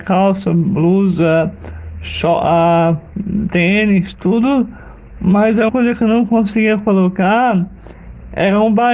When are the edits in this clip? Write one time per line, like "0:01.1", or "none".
0:05.7